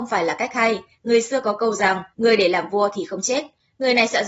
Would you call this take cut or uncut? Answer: cut